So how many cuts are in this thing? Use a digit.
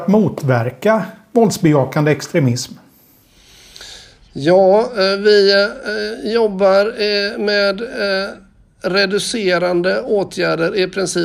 0